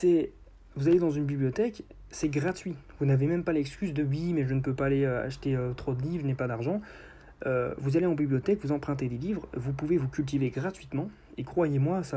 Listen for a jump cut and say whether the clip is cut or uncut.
uncut